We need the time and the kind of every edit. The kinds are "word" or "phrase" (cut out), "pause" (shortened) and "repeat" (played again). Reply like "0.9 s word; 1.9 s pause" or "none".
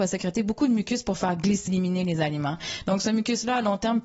1.7 s word